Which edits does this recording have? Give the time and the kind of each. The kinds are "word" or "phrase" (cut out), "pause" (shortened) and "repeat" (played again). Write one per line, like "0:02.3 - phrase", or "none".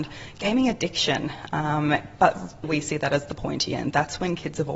0:02.6 - word